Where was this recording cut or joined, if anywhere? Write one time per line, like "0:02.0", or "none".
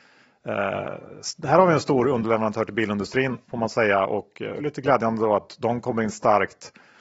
0:03.4